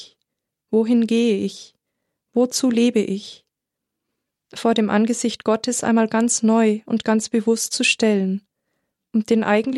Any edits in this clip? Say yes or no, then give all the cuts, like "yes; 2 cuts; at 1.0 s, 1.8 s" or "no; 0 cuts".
no; 0 cuts